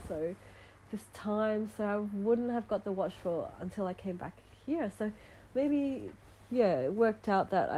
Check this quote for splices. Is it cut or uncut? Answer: uncut